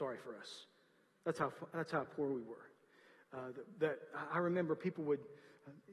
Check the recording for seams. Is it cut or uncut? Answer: uncut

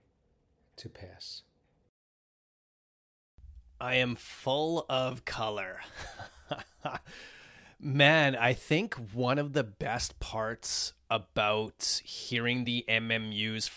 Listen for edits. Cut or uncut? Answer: uncut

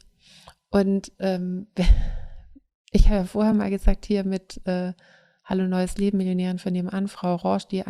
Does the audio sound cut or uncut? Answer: uncut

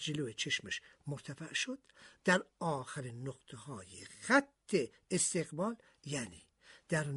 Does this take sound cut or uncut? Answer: uncut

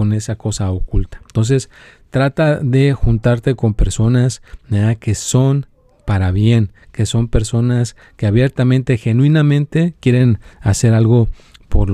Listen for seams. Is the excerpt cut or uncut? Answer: uncut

